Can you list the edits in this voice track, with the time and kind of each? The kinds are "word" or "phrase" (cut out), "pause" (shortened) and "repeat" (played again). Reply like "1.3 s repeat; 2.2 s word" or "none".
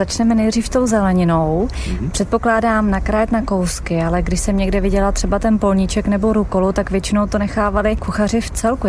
none

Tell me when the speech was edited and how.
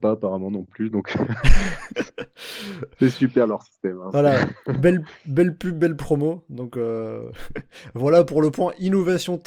none

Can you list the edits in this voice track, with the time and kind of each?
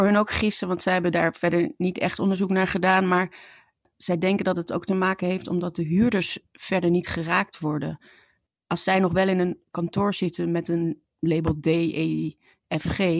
none

